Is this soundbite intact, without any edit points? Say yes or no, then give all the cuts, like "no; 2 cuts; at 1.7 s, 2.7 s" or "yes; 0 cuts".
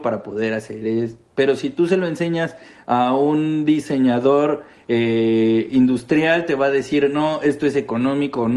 yes; 0 cuts